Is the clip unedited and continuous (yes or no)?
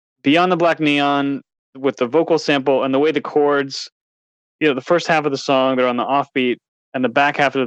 yes